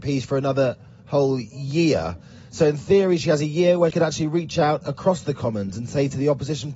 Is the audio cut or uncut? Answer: cut